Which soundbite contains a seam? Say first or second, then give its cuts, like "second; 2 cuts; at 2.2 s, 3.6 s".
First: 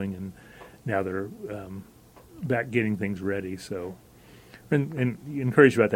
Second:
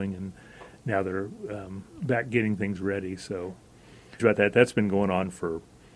second; 2 cuts; at 1.9 s, 4.2 s